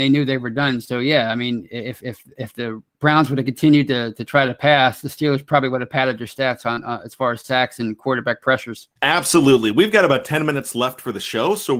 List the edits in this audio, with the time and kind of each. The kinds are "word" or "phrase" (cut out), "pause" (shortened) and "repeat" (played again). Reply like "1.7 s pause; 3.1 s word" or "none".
2.9 s pause; 9.0 s pause

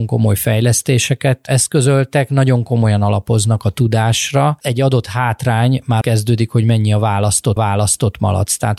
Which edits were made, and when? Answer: 6.0 s word; 7.6 s repeat

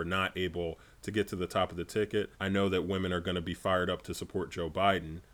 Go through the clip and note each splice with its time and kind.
2.3 s pause

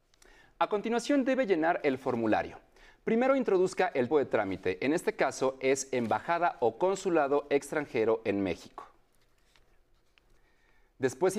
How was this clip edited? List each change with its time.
4.1 s word

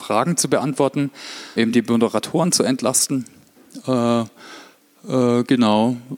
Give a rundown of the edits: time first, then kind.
1.6 s phrase

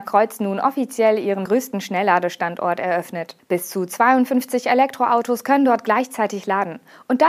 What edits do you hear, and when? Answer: 1.5 s word; 3.4 s pause

